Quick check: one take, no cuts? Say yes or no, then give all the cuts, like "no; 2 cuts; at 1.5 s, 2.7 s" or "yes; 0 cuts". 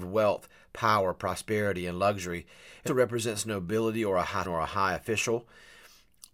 no; 2 cuts; at 2.9 s, 4.4 s